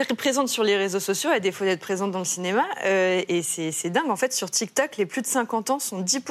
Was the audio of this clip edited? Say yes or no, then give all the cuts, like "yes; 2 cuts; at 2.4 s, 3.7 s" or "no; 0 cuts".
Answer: no; 0 cuts